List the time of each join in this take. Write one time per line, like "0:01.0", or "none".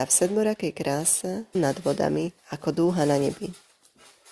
0:01.5
0:02.4